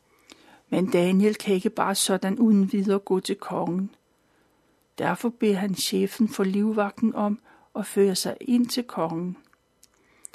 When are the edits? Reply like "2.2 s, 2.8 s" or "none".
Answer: none